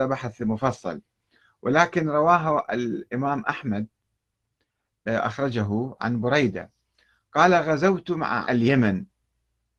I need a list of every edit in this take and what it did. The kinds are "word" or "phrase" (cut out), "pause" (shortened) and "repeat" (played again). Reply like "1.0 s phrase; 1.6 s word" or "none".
8.4 s word